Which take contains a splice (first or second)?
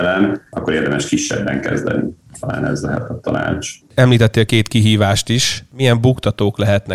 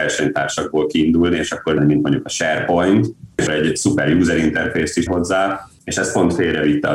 second